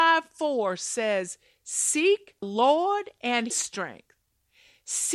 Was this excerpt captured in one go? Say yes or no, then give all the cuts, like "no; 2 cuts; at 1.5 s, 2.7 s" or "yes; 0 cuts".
no; 2 cuts; at 2.4 s, 3.5 s